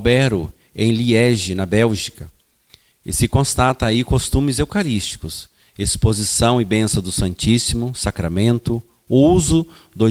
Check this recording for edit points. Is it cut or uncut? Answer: uncut